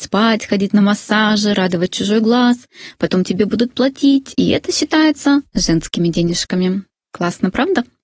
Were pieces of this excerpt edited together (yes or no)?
no